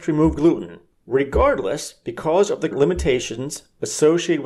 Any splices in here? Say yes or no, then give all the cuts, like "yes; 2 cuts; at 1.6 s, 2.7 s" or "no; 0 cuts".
yes; 1 cut; at 2.7 s